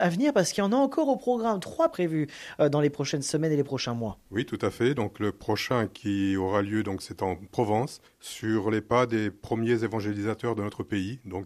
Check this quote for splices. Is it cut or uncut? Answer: cut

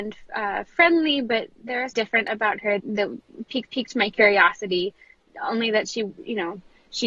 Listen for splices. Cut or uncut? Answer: cut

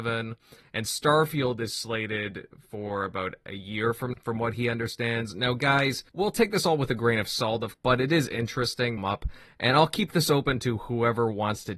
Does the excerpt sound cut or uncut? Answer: cut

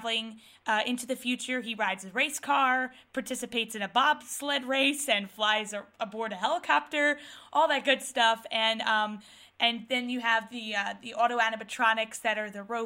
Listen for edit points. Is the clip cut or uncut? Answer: uncut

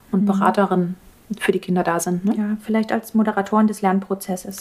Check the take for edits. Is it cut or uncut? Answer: uncut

